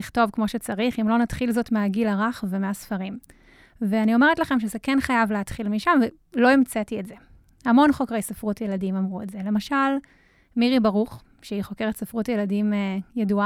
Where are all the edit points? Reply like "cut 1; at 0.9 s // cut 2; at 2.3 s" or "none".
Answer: none